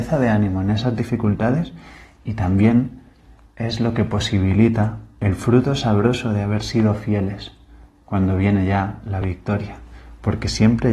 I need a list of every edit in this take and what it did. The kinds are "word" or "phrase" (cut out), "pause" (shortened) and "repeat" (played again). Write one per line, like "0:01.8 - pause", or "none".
none